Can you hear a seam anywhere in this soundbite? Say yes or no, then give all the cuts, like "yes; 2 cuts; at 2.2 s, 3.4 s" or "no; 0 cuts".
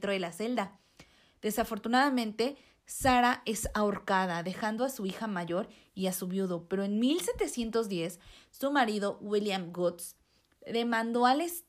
no; 0 cuts